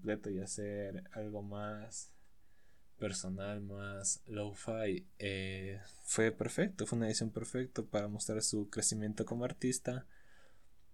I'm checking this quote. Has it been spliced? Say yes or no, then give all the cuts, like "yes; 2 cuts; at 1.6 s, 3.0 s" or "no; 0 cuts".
no; 0 cuts